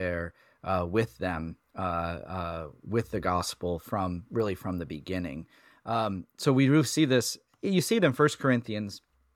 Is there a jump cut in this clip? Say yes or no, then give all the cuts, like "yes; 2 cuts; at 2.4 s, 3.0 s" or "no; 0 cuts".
no; 0 cuts